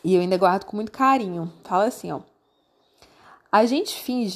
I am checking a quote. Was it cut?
no; 0 cuts

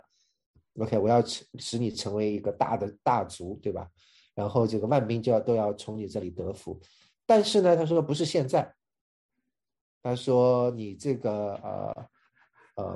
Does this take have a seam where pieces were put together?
no; 0 cuts

